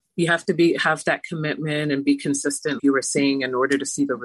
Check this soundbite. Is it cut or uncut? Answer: cut